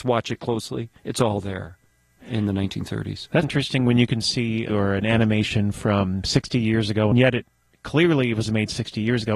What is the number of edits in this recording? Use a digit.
4